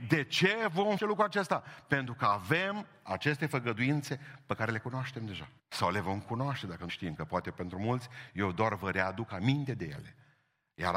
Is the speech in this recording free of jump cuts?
no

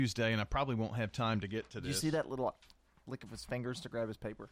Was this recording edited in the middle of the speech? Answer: no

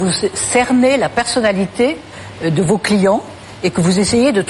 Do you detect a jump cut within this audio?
no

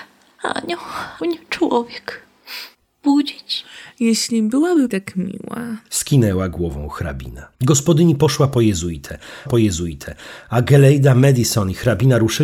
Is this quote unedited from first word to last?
no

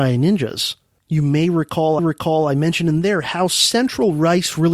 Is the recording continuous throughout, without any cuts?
no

